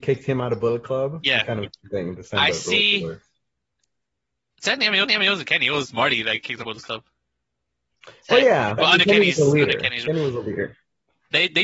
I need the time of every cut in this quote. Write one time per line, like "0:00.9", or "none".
0:05.0
0:06.6
0:08.8